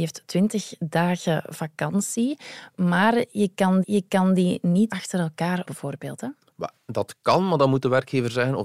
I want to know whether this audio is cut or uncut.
cut